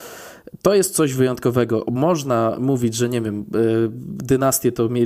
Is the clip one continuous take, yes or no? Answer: yes